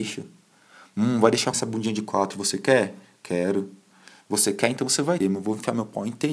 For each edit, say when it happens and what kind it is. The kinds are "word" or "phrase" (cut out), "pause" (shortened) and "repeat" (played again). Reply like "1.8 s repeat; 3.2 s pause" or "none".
1.5 s word; 5.2 s word